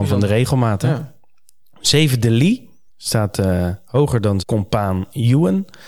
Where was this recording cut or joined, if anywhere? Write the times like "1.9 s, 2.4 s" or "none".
2.9 s, 4.4 s